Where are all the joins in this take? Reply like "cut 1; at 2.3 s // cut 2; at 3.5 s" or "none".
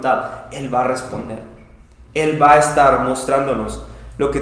none